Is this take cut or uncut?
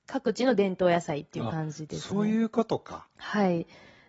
cut